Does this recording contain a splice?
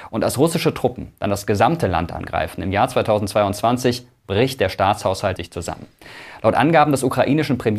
yes; 1 cut; at 5.4 s

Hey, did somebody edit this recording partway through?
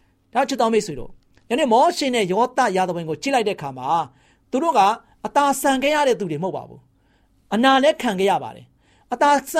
no; 0 cuts

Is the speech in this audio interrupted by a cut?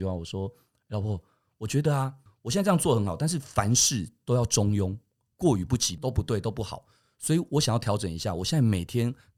no; 0 cuts

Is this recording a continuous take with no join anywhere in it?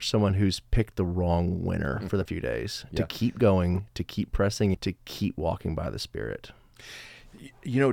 no; 2 cuts; at 2.3 s, 4.7 s

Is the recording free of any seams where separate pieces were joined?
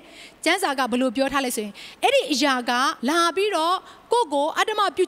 no; 1 cut; at 3.0 s

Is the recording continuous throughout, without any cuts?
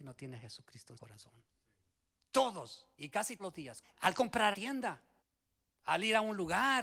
no; 6 cuts; at 1.0 s, 2.9 s, 3.4 s, 3.8 s, 4.5 s, 5.2 s

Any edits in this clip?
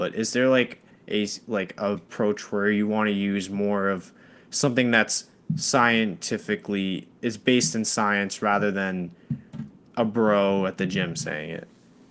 no; 0 cuts

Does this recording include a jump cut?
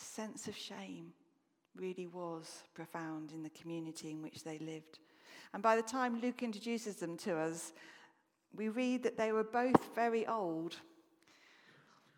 no; 0 cuts

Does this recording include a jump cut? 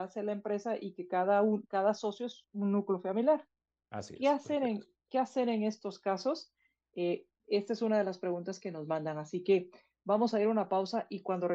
no; 0 cuts

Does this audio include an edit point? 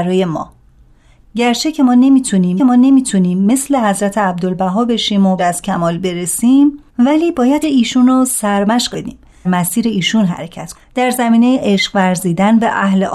yes; 7 cuts; at 2.6 s, 5.4 s, 6.9 s, 7.6 s, 8.9 s, 9.4 s, 10.7 s

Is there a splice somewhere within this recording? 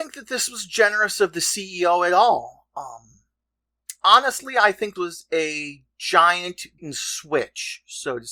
yes; 2 cuts; at 5.0 s, 6.8 s

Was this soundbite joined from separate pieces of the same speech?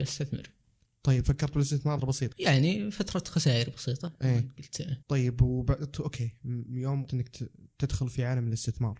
yes; 4 cuts; at 2.0 s, 2.3 s, 5.0 s, 7.1 s

